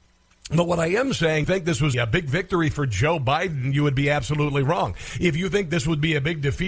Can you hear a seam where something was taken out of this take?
yes; 2 cuts; at 1.4 s, 1.9 s

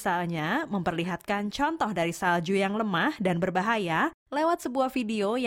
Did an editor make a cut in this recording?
no; 0 cuts

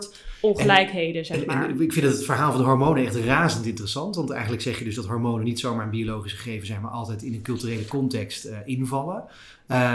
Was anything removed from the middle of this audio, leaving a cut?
no; 0 cuts

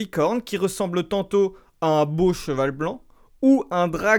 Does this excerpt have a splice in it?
no; 0 cuts

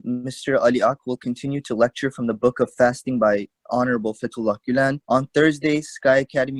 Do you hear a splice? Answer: yes; 1 cut; at 5.0 s

